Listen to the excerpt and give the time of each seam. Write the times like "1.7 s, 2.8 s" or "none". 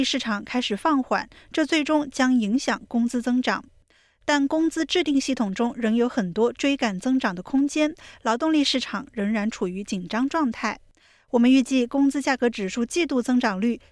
none